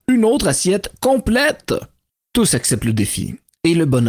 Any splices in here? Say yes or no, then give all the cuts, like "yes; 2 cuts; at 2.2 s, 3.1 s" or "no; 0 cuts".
no; 0 cuts